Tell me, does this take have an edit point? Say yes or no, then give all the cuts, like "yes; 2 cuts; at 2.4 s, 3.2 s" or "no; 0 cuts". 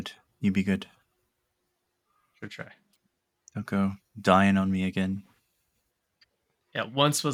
no; 0 cuts